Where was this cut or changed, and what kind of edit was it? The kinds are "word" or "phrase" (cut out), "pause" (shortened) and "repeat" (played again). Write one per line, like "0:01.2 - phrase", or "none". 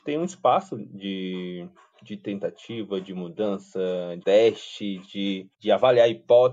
0:01.9 - word
0:04.2 - word
0:05.5 - pause